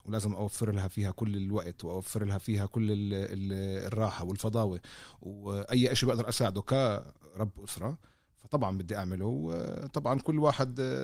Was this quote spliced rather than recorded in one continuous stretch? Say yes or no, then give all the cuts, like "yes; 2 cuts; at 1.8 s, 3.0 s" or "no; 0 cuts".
no; 0 cuts